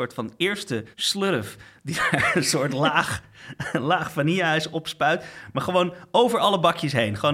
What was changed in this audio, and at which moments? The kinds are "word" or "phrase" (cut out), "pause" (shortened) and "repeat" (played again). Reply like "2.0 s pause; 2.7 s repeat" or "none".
0.9 s pause